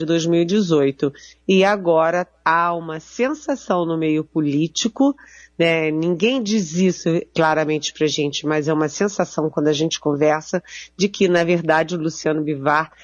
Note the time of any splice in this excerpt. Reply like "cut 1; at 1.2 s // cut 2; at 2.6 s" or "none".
none